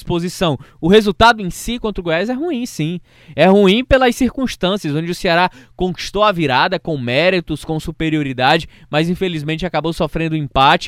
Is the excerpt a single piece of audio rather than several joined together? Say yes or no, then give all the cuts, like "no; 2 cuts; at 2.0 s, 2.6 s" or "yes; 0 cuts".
yes; 0 cuts